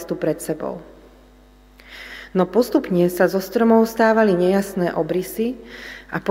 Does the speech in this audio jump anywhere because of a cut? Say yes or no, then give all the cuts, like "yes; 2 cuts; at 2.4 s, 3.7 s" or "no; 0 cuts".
no; 0 cuts